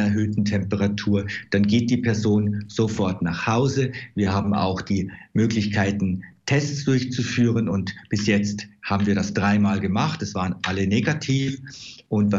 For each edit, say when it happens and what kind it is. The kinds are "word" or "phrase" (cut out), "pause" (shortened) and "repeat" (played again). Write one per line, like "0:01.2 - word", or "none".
none